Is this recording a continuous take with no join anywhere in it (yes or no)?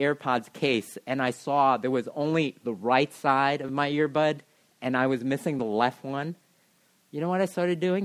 yes